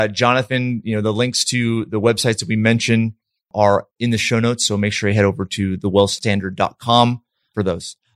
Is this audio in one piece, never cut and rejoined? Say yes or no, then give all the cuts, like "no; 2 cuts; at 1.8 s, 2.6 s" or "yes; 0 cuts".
yes; 0 cuts